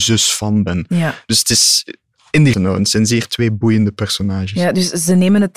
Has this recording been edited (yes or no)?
yes